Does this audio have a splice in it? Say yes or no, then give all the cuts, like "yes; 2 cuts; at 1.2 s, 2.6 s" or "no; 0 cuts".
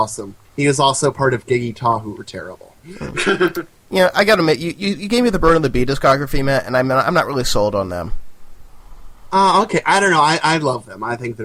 no; 0 cuts